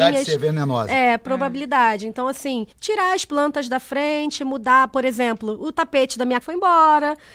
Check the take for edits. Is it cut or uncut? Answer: cut